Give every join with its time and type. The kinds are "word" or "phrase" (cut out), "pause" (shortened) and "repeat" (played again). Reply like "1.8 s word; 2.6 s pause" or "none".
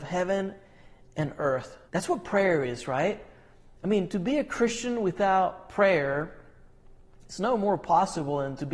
1.9 s pause